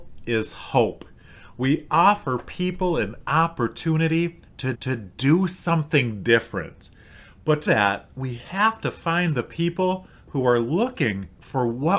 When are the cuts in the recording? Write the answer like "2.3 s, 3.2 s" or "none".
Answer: 4.7 s, 7.7 s